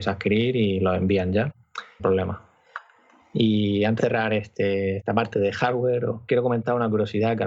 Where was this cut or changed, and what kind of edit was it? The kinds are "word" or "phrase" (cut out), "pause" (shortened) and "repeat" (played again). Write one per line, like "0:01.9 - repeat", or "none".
0:02.0 - word
0:04.0 - word

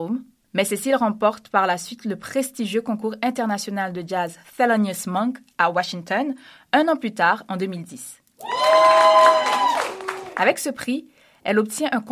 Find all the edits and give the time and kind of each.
none

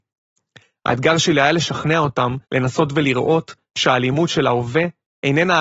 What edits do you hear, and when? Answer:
0:02.4 - pause

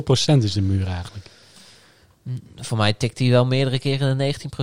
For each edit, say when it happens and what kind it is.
none

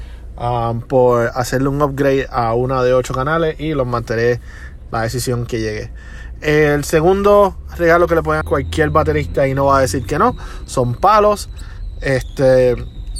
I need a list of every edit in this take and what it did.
0:04.9 - phrase
0:05.5 - word
0:08.4 - word

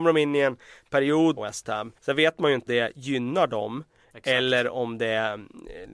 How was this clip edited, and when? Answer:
0:01.4 - phrase
0:02.0 - pause
0:02.7 - word

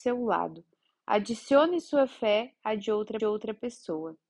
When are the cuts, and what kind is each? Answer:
0:03.2 - repeat

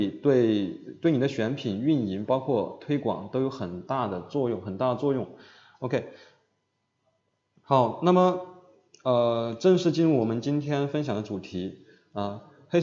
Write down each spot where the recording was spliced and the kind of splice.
none

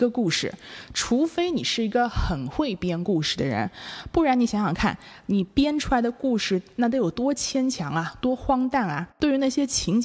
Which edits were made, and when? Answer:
0:05.5 - pause
0:09.1 - pause

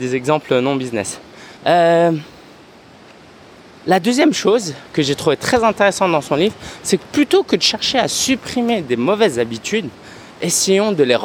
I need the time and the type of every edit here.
0:01.6 - pause
0:04.9 - pause

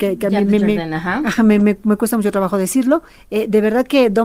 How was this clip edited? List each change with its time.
none

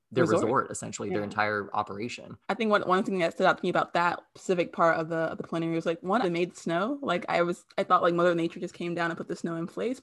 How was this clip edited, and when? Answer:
0:02.4 - pause
0:06.2 - phrase

